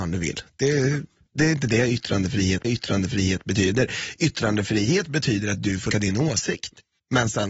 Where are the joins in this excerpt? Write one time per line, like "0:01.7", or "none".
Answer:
0:02.6
0:05.9